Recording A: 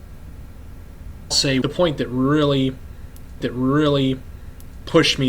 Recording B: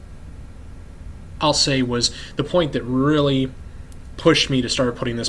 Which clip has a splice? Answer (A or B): A